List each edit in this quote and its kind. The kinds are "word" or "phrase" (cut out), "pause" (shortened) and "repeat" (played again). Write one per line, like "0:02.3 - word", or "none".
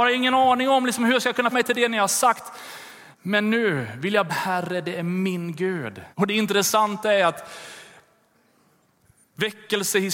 0:01.5 - word
0:03.1 - pause
0:04.3 - phrase
0:06.1 - pause